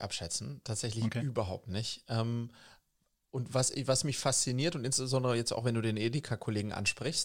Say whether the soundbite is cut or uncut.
uncut